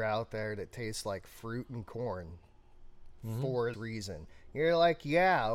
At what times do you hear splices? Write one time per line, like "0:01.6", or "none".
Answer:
0:03.7